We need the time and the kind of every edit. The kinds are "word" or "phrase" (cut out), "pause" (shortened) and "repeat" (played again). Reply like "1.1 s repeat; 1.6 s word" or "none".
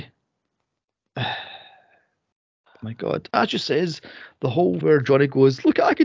3.3 s word; 4.8 s word